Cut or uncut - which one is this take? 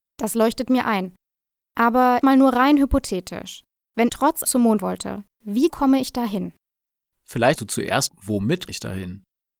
cut